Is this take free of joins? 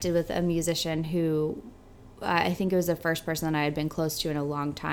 yes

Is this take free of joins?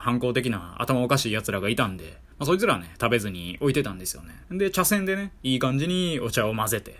no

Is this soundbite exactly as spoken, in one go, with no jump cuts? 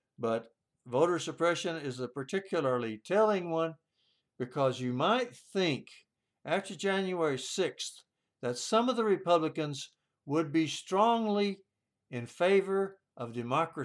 yes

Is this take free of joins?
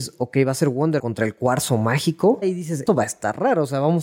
no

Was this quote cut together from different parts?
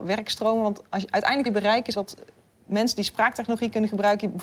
yes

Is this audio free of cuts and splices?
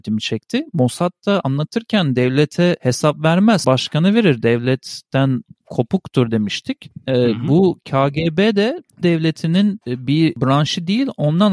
no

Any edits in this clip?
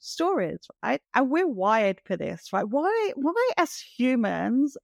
no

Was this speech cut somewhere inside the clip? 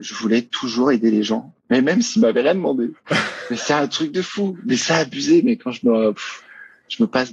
no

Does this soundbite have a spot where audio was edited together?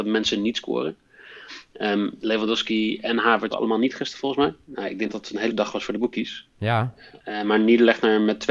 yes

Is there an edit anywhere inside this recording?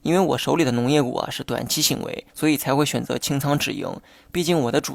yes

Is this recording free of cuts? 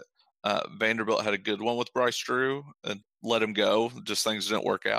no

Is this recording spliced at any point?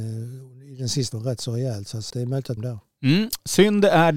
yes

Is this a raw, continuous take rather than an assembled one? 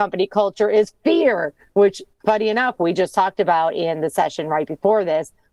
no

